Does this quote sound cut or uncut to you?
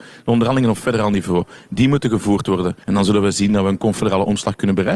cut